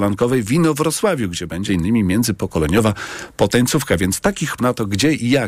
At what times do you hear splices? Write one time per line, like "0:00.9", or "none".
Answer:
0:01.7
0:04.6

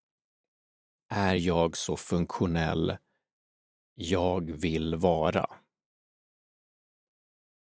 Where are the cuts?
none

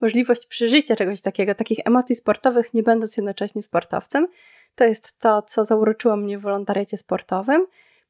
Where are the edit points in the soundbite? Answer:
none

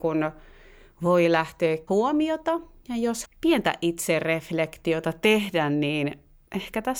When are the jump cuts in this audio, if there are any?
0:01.9
0:03.2

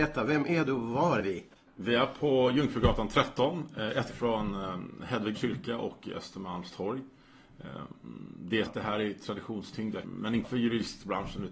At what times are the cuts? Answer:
0:01.2
0:01.5
0:04.1
0:05.3
0:08.7
0:10.0
0:10.4

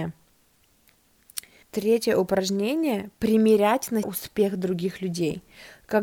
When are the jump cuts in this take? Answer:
0:01.6
0:04.0

